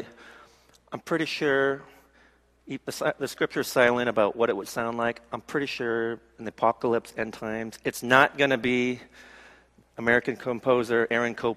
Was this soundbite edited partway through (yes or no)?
no